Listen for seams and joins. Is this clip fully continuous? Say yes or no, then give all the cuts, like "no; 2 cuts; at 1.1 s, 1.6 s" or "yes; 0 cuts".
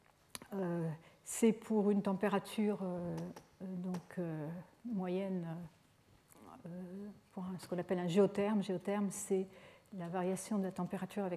yes; 0 cuts